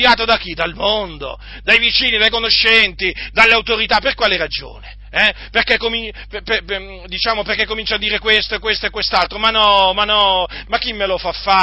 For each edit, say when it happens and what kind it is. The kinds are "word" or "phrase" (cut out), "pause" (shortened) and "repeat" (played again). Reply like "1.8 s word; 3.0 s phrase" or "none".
none